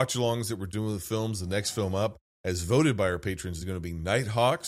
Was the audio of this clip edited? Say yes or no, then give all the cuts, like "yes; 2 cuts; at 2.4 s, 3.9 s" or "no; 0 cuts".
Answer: no; 0 cuts